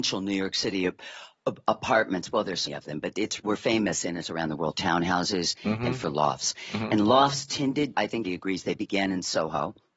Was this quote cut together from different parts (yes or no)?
yes